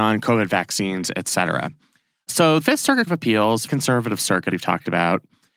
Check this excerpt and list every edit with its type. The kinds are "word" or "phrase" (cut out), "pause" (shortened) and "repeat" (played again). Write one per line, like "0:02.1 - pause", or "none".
0:02.6 - word
0:03.1 - word
0:03.7 - word
0:04.5 - word